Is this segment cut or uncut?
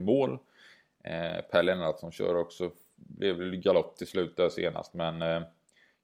uncut